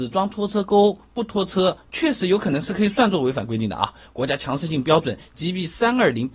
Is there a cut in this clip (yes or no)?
no